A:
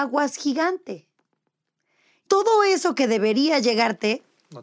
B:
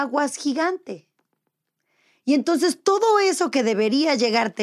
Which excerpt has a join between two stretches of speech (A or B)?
A